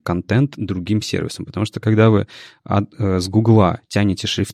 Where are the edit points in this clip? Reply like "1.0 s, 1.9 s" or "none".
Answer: none